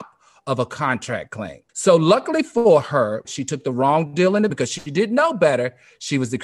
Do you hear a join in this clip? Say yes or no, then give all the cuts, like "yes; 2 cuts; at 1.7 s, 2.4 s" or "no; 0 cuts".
yes; 3 cuts; at 1.7 s, 3.2 s, 4.5 s